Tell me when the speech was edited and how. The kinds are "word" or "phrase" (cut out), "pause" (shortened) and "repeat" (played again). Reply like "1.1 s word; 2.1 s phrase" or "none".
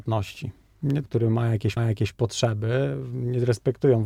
1.0 s phrase; 1.8 s repeat